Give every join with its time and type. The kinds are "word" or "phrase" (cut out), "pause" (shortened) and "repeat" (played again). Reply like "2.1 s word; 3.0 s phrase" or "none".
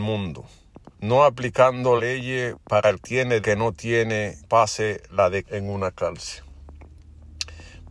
0.9 s pause; 2.0 s word; 3.0 s word; 3.4 s phrase; 4.4 s word; 5.4 s word